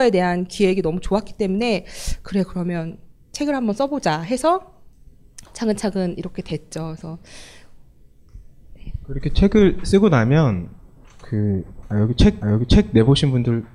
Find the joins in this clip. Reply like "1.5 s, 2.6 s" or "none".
12.4 s